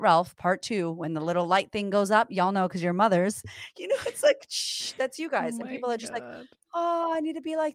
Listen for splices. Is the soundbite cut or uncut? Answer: uncut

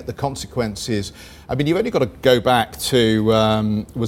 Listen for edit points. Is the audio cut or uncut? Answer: uncut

